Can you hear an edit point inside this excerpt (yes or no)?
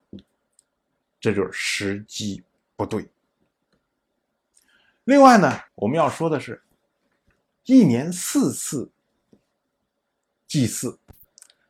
yes